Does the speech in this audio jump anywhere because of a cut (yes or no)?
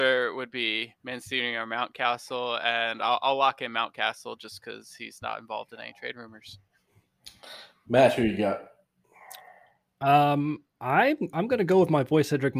no